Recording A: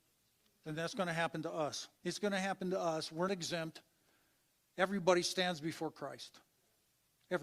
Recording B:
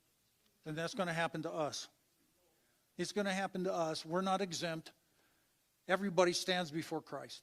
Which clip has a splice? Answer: A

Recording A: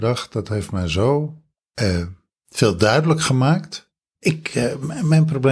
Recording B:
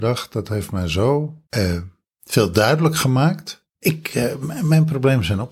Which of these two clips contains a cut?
B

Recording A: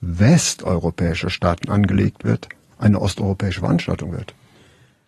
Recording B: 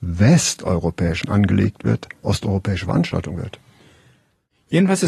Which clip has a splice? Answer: B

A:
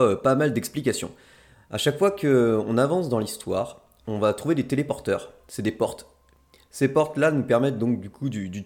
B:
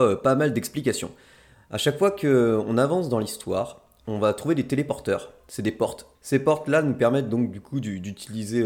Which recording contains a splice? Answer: B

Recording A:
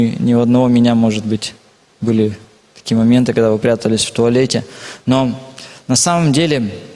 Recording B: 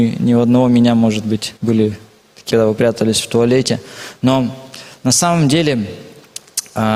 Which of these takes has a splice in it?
B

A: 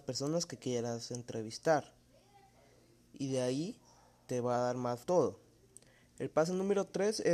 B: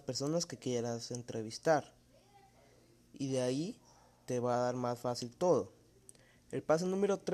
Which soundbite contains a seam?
A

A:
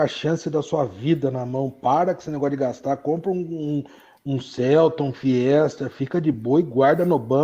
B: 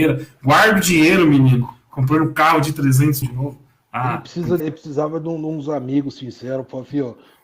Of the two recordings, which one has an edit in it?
B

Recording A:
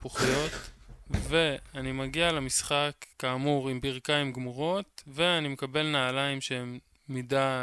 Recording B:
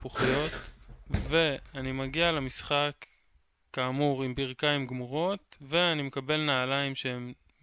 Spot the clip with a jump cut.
A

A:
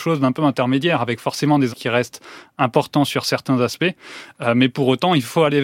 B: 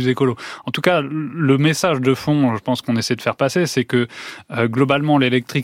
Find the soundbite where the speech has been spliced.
A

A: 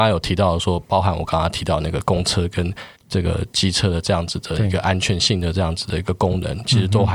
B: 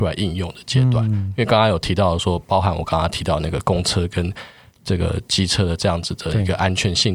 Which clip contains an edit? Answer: A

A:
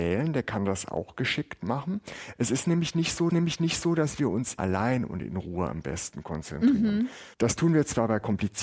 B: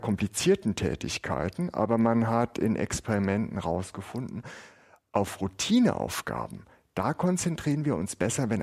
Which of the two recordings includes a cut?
A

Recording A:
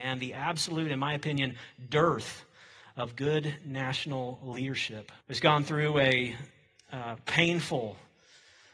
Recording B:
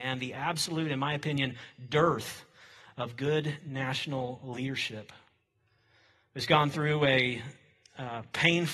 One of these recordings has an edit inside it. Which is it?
A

